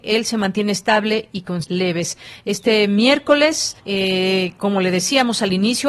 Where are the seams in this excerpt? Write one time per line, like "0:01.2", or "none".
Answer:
0:01.6
0:03.8